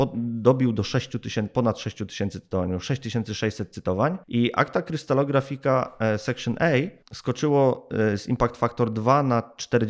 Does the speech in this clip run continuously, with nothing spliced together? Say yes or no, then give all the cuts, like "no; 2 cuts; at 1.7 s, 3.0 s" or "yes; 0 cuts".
no; 2 cuts; at 4.2 s, 7.0 s